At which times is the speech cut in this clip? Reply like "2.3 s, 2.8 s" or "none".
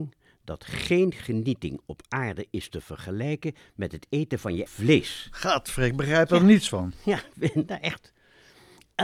4.7 s